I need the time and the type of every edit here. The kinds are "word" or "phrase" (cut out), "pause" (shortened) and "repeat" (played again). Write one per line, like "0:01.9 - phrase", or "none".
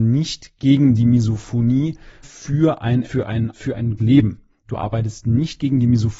0:02.2 - word
0:03.0 - word
0:03.5 - word
0:04.0 - word